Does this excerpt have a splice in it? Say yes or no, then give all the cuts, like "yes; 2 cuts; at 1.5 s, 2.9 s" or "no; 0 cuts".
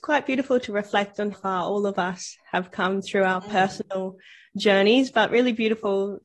yes; 1 cut; at 1.3 s